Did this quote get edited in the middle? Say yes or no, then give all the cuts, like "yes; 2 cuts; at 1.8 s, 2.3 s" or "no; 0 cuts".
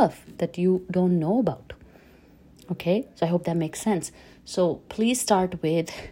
no; 0 cuts